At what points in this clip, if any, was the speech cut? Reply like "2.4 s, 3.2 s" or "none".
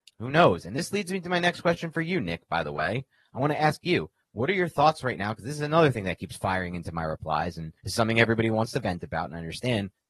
7.8 s